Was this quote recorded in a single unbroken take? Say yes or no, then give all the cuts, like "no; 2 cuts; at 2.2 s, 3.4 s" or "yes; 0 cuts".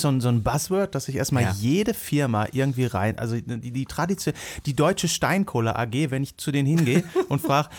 yes; 0 cuts